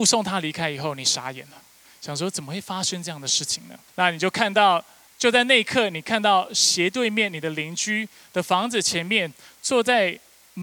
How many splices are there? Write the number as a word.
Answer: three